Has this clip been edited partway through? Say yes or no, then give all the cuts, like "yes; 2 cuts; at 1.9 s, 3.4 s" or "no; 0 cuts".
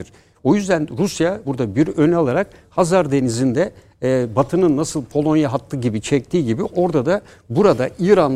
yes; 1 cut; at 1.4 s